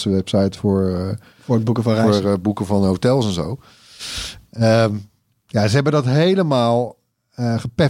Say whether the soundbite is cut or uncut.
uncut